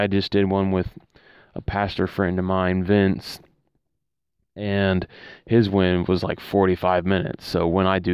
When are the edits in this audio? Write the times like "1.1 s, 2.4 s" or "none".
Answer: none